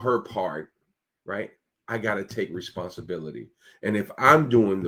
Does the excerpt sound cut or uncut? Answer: uncut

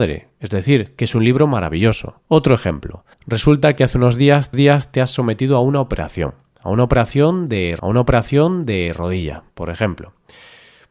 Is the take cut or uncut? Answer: cut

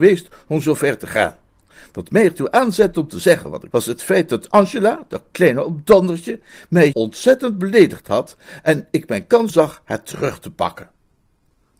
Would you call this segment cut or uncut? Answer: cut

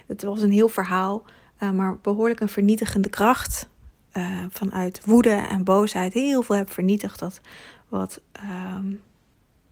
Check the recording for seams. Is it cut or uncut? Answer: uncut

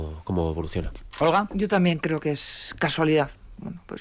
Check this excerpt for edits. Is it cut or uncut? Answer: uncut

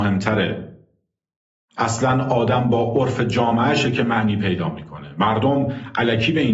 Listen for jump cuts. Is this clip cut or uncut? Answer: uncut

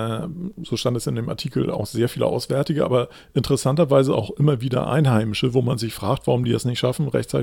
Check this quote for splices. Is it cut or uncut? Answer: uncut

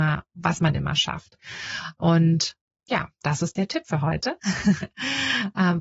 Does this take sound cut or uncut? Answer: uncut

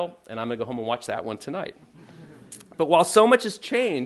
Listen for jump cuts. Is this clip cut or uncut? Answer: uncut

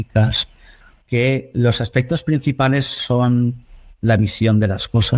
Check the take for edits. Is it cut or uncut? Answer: uncut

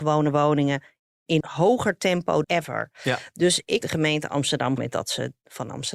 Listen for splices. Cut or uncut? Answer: cut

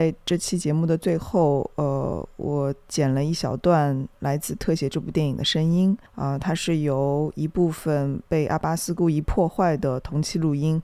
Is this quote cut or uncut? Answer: cut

